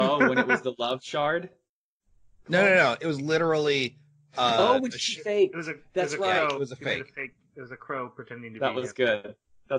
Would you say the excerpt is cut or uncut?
uncut